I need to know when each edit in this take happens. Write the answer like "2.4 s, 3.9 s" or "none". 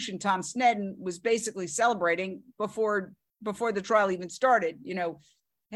none